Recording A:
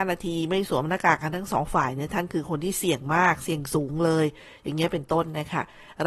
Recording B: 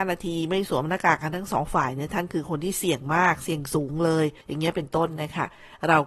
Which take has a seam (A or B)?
B